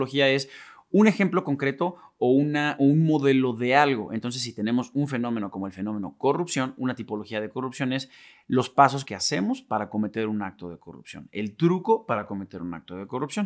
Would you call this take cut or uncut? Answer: cut